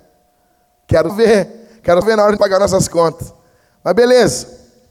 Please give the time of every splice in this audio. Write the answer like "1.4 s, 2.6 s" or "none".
1.1 s, 2.0 s, 2.4 s